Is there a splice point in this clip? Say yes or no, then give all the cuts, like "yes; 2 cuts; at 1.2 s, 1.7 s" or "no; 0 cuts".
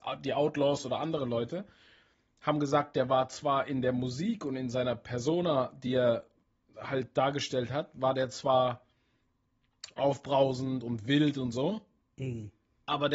no; 0 cuts